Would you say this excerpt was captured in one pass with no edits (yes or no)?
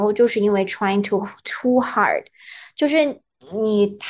yes